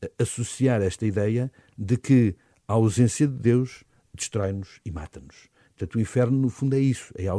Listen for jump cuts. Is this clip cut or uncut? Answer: uncut